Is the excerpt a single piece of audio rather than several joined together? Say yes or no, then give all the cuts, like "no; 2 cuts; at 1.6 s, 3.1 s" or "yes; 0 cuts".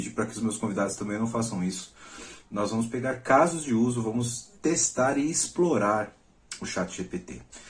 no; 1 cut; at 4.6 s